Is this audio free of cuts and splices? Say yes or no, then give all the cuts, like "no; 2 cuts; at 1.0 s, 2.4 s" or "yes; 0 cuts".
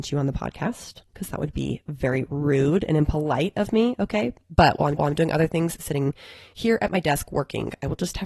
no; 1 cut; at 5.0 s